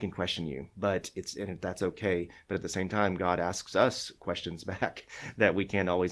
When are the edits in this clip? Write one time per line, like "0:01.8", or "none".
none